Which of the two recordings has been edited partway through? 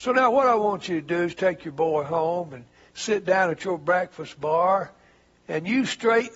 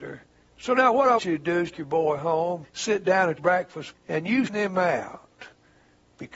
second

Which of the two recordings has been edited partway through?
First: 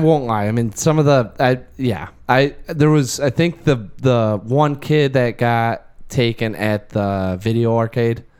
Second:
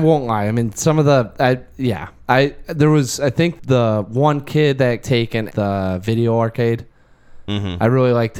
second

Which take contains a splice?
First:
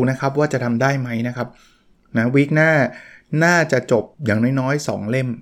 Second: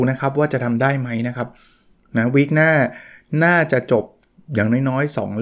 first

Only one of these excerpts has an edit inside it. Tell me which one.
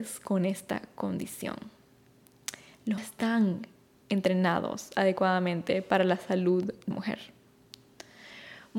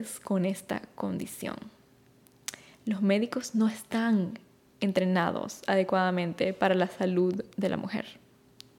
first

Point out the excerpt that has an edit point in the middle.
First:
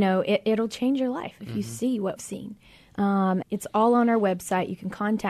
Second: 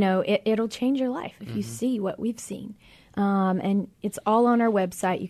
first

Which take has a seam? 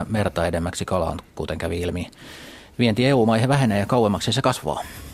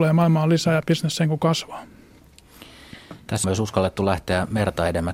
second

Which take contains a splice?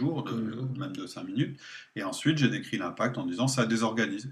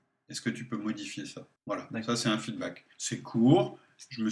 second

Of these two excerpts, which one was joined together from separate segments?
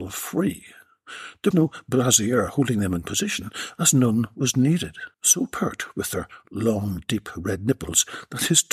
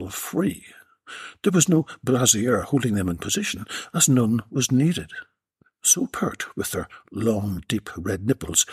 first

